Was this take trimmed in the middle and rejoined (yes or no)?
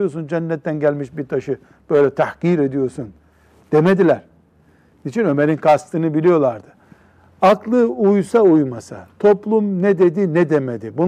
no